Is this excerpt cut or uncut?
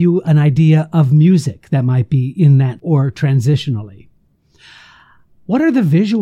cut